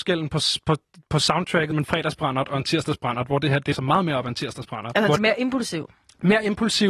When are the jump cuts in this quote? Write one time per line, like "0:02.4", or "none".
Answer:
0:01.7
0:03.7
0:05.2